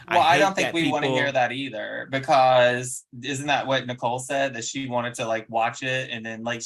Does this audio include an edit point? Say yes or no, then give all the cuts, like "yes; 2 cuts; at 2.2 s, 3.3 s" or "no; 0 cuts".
no; 0 cuts